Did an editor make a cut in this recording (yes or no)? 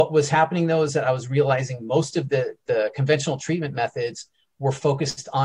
no